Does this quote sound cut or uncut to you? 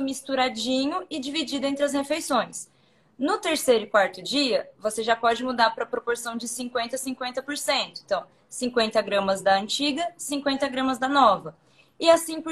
uncut